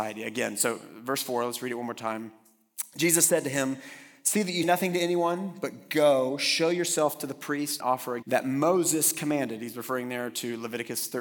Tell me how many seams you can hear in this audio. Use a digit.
3